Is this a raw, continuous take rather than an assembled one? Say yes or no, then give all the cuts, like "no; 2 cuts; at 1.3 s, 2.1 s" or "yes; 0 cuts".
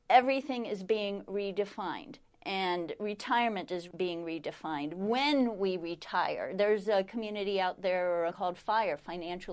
no; 1 cut; at 8.3 s